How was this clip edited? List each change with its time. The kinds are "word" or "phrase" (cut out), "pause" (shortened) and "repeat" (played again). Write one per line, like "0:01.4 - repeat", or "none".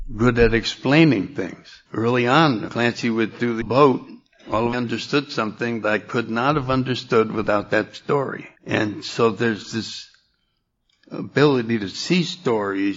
0:01.9 - pause
0:02.7 - word
0:03.6 - word
0:04.7 - phrase
0:05.8 - word
0:08.5 - pause